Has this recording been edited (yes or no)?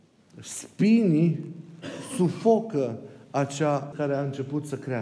yes